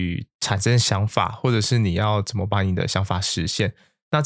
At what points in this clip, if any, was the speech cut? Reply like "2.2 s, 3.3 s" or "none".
none